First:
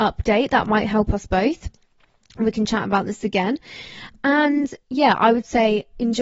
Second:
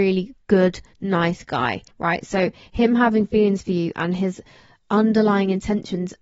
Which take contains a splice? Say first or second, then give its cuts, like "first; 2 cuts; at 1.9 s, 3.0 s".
second; 1 cut; at 1.9 s